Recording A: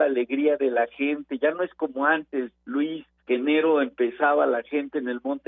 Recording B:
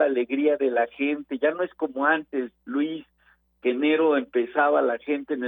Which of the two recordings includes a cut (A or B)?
A